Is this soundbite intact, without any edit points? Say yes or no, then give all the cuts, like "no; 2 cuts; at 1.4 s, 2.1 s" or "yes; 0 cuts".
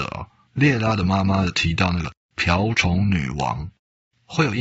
yes; 0 cuts